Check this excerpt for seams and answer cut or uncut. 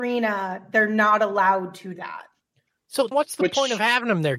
cut